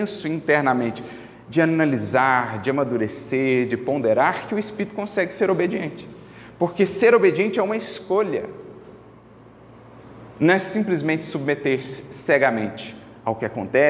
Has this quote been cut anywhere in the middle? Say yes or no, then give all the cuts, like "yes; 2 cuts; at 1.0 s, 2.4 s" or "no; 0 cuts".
no; 0 cuts